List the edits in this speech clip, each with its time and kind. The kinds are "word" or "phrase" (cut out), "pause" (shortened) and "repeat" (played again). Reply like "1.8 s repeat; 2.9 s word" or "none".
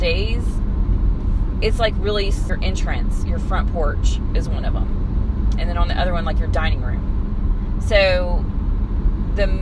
2.5 s word